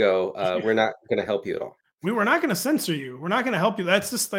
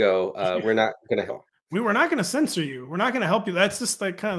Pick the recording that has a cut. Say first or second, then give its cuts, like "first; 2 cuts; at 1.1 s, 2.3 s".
second; 1 cut; at 1.3 s